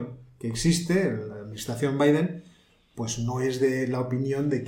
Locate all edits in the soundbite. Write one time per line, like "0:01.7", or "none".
none